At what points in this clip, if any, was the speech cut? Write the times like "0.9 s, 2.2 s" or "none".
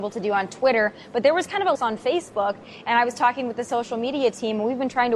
1.8 s